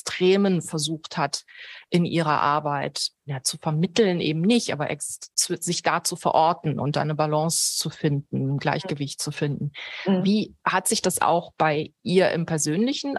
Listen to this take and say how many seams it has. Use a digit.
1